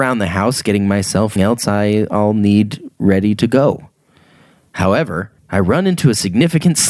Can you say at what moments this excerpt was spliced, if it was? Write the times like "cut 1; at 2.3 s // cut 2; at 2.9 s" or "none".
cut 1; at 1.4 s // cut 2; at 5.4 s